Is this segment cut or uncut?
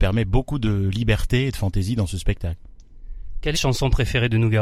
cut